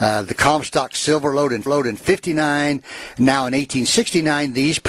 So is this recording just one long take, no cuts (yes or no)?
no